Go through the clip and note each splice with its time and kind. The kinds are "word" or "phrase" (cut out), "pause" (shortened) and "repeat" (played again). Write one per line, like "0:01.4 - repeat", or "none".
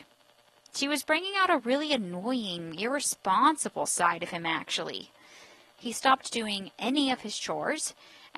none

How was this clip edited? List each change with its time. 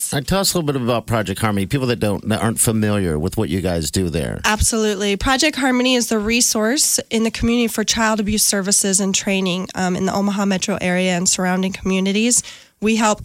none

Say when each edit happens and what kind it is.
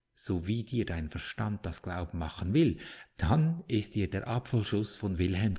none

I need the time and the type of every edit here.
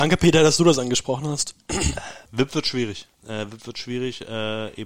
0:02.3 - pause
0:03.1 - pause

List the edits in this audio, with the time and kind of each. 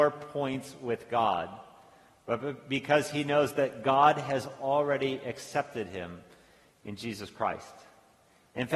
none

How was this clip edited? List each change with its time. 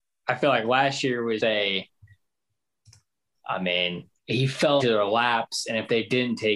0:01.4 - word
0:04.2 - pause
0:04.8 - word

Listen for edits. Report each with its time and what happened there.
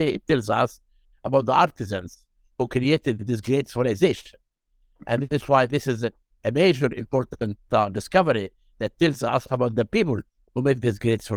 none

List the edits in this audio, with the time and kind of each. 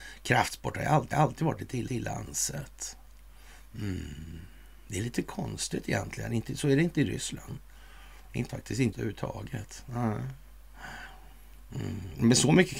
0:01.1 - repeat
0:01.9 - repeat
0:08.5 - word
0:08.9 - phrase

